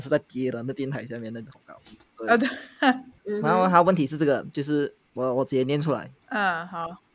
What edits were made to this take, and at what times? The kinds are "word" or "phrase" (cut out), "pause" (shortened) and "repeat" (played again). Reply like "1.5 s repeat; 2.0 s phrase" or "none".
3.2 s pause